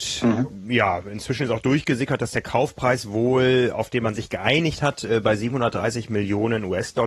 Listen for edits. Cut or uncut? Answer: uncut